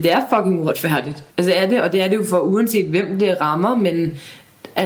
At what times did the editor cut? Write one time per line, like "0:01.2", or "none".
0:01.3